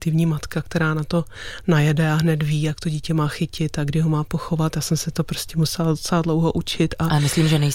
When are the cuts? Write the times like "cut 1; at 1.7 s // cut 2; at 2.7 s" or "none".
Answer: none